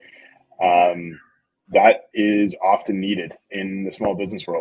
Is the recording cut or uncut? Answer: uncut